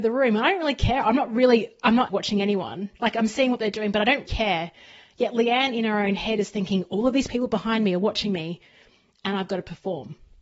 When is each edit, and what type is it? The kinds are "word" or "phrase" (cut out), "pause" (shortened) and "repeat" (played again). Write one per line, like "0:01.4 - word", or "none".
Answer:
0:02.1 - word
0:03.0 - pause
0:04.3 - word